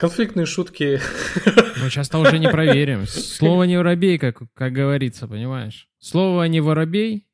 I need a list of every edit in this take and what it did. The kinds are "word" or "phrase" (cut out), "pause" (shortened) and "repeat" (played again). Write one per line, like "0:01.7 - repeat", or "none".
none